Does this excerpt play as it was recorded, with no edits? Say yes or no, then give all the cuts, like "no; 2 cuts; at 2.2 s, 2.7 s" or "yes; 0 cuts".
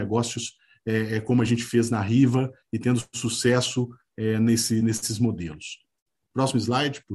yes; 0 cuts